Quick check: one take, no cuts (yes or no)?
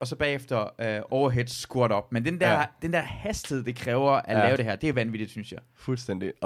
yes